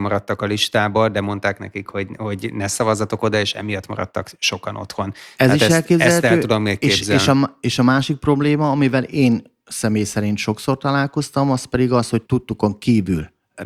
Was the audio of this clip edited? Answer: no; 0 cuts

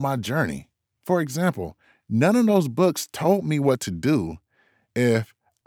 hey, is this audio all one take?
yes; 0 cuts

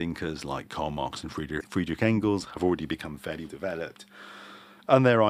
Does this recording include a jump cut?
yes; 2 cuts; at 1.6 s, 3.5 s

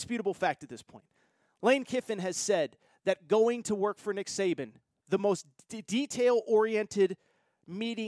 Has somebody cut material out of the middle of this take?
no; 0 cuts

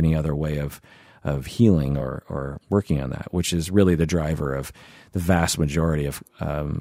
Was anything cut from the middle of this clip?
no; 0 cuts

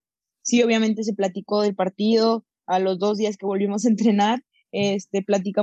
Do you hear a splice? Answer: no; 0 cuts

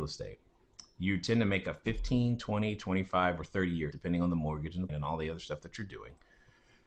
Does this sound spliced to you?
yes; 2 cuts; at 3.9 s, 4.9 s

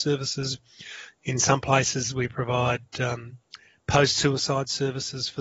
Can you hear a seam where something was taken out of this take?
no; 0 cuts

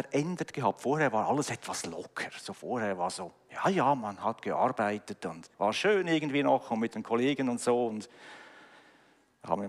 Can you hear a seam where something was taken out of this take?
yes; 1 cut; at 5.5 s

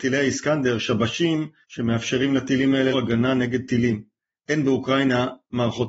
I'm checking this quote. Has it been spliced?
yes; 1 cut; at 2.9 s

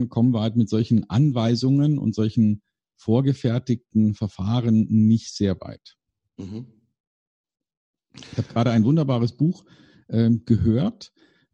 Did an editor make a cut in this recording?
yes; 1 cut; at 2.9 s

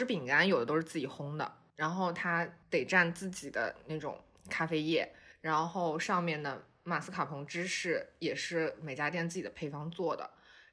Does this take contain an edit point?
no; 0 cuts

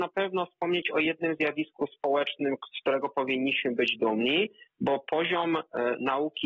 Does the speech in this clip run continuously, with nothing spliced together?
yes; 0 cuts

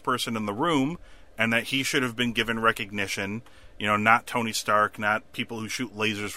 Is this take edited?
no; 0 cuts

